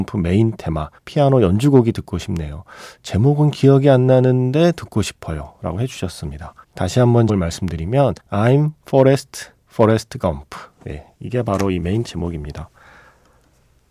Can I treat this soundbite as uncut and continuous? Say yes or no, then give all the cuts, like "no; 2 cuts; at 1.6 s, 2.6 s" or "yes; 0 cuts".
no; 6 cuts; at 1.0 s, 6.6 s, 7.3 s, 8.2 s, 9.6 s, 12.1 s